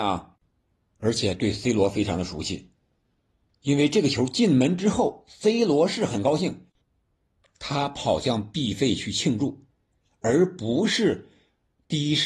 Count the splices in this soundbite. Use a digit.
0